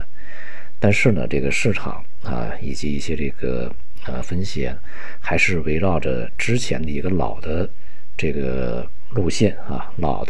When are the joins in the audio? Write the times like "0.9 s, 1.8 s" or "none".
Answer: 4.2 s